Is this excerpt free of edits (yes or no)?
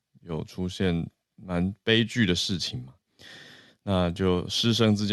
yes